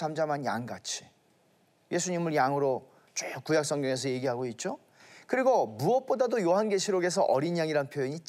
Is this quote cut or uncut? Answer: uncut